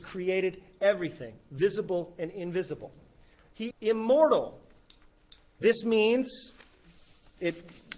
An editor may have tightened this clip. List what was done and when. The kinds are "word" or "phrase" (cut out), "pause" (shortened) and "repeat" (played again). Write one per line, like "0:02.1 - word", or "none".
0:03.7 - word